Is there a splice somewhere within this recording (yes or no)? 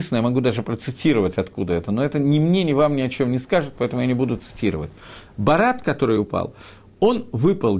no